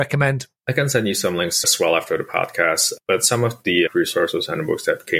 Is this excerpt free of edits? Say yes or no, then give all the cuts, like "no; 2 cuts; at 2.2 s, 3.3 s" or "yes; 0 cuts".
no; 1 cut; at 1.6 s